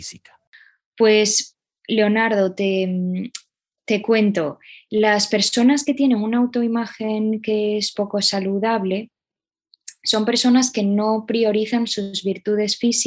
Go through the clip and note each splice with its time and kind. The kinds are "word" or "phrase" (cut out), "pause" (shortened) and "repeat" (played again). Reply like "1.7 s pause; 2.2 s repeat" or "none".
none